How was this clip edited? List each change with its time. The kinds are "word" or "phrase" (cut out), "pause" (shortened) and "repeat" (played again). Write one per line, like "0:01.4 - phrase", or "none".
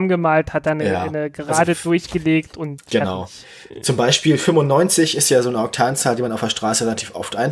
none